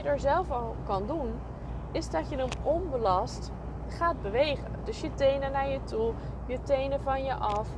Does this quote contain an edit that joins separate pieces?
no; 0 cuts

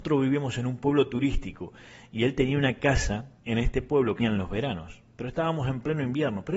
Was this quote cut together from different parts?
yes; 2 cuts; at 3.4 s, 4.2 s

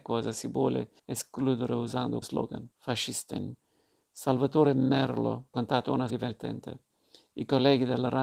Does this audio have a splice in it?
yes; 5 cuts; at 1.0 s, 2.2 s, 2.7 s, 5.5 s, 6.1 s

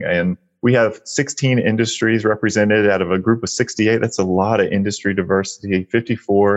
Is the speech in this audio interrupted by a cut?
no; 0 cuts

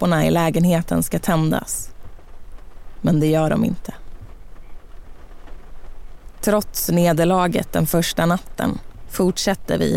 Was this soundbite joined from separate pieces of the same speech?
no; 0 cuts

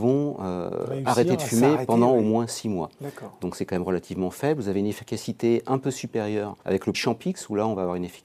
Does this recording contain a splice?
yes; 2 cuts; at 6.6 s, 6.9 s

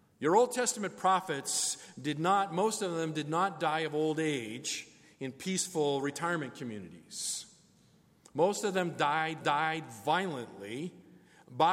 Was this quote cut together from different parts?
yes; 1 cut; at 9.4 s

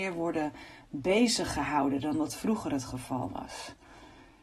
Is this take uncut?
yes; 0 cuts

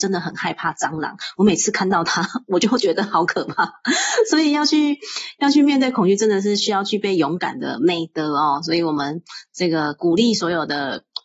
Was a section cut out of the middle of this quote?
no; 0 cuts

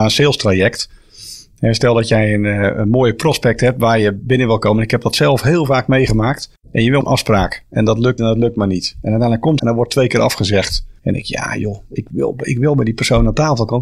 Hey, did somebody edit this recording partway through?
yes; 5 cuts; at 6.6 s, 7.0 s, 8.2 s, 9.6 s, 11.0 s

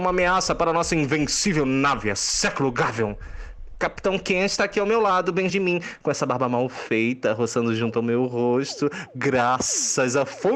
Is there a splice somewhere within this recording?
yes; 1 cut; at 5.5 s

